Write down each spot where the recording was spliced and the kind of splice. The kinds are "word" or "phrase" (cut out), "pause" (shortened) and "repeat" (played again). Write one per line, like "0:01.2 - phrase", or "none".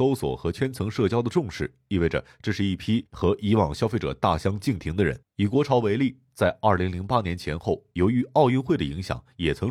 0:05.2 - pause